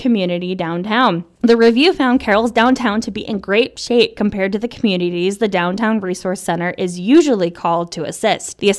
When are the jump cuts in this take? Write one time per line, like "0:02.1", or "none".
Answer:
none